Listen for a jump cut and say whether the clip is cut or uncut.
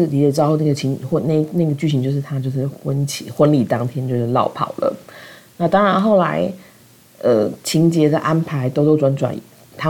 uncut